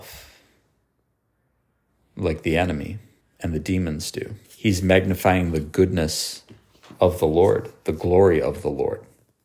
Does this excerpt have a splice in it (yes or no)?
yes